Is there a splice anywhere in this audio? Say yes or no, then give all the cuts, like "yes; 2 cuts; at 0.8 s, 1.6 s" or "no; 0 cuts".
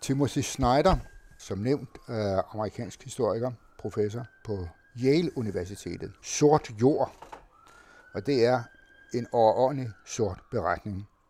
yes; 1 cut; at 6.2 s